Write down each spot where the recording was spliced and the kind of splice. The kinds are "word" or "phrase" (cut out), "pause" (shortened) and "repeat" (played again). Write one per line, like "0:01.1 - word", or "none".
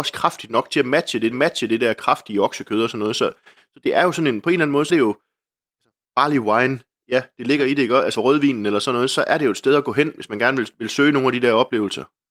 0:01.3 - repeat
0:04.9 - word
0:08.1 - phrase